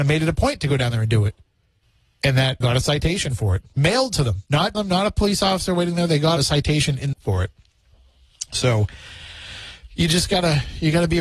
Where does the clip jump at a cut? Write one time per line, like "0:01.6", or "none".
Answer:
0:01.8
0:02.6
0:04.7
0:06.4
0:07.1

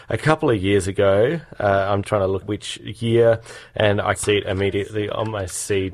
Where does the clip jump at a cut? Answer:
0:02.0
0:02.4
0:04.2

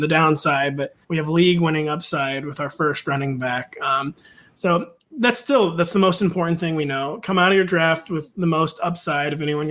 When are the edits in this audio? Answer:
0:01.0

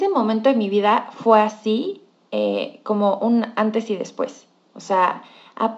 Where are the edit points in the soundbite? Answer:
none

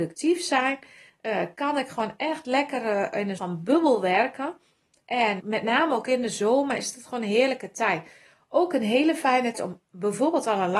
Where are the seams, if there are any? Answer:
0:03.4
0:05.4
0:09.5

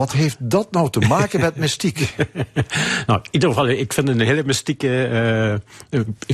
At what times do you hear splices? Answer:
none

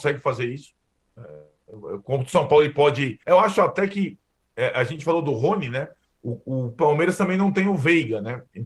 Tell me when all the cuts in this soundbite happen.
0:03.2
0:06.0

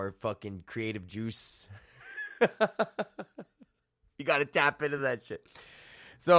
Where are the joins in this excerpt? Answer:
none

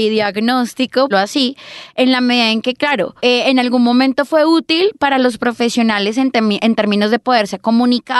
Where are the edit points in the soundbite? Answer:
0:01.1
0:03.2

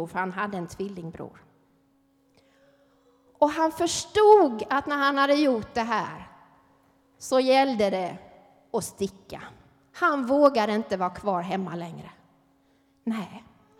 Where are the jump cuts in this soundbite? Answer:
none

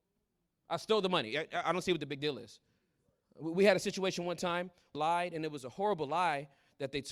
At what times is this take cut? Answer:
0:04.9

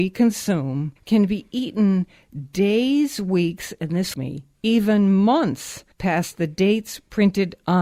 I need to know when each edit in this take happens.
0:01.0
0:04.1
0:05.9

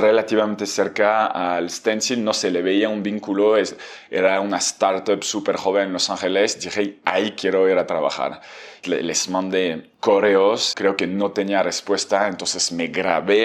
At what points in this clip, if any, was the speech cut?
0:08.8

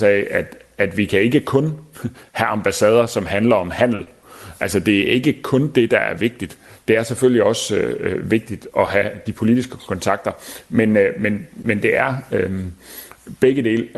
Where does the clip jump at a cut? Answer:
none

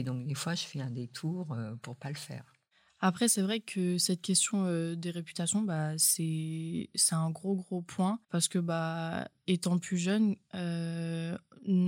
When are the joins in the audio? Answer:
0:08.2

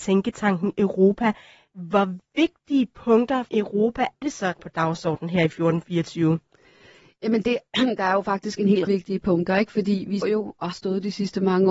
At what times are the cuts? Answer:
0:03.5
0:04.2
0:04.6
0:08.9
0:10.2
0:10.7

